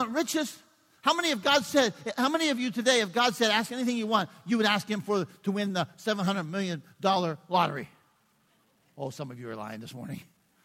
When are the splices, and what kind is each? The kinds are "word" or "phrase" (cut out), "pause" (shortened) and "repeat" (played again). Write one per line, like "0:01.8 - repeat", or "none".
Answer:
none